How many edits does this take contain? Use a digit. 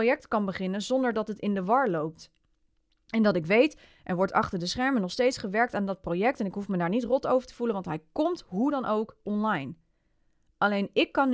0